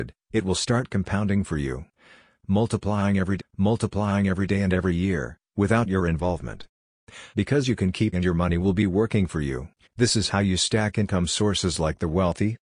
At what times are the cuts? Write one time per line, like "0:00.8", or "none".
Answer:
0:03.4
0:07.3
0:08.1
0:09.8